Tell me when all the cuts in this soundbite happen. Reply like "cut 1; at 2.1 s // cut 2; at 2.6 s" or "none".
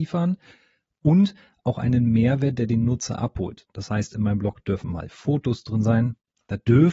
none